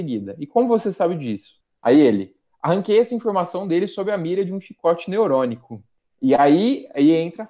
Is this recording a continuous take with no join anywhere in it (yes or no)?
yes